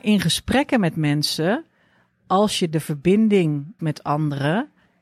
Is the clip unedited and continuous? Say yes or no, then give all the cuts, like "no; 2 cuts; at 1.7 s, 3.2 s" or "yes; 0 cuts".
no; 2 cuts; at 2.7 s, 3.8 s